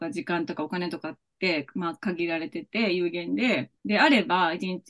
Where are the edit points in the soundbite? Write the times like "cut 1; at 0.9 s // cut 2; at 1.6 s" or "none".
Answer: cut 1; at 3.8 s